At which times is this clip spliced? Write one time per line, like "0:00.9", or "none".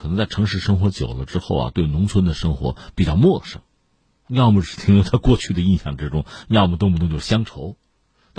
none